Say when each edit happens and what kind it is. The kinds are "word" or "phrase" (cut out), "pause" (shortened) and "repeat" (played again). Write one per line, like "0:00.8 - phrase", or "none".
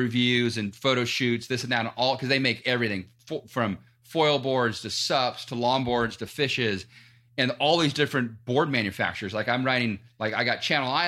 none